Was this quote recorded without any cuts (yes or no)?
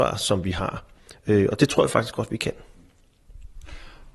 yes